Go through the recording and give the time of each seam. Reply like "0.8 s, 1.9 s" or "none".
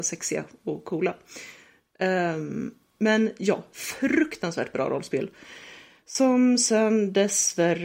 none